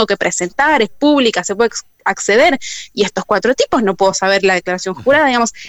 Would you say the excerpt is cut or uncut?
uncut